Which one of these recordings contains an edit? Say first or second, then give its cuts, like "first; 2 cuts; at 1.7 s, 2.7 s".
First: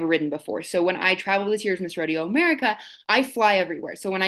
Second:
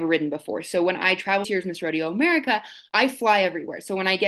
second; 1 cut; at 1.4 s